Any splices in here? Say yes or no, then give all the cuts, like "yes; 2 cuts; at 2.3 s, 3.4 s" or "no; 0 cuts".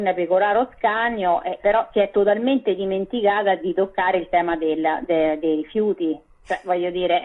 yes; 1 cut; at 1.6 s